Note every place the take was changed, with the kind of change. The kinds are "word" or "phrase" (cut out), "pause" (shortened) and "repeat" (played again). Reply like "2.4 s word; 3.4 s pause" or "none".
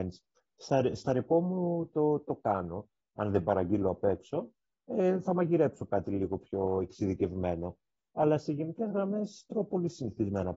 none